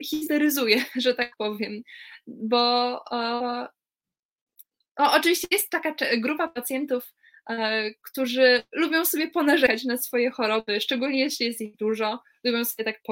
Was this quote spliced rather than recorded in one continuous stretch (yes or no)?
no